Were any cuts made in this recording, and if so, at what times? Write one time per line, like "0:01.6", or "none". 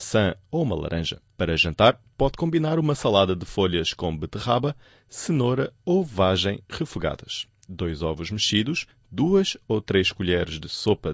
none